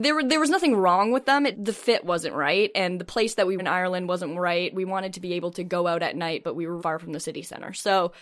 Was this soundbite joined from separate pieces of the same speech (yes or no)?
yes